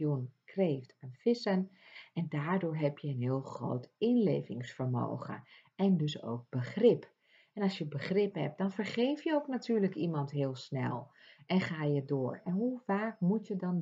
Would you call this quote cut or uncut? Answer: uncut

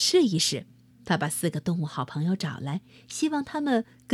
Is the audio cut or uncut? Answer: cut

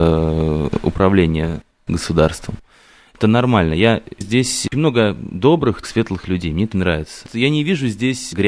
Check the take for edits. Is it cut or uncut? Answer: cut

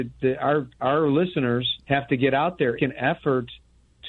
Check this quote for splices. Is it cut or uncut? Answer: cut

